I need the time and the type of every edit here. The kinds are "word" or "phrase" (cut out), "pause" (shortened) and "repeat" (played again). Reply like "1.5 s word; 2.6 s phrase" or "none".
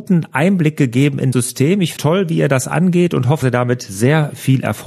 1.3 s word; 2.0 s word; 3.4 s word